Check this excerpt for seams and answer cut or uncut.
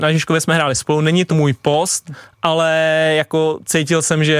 cut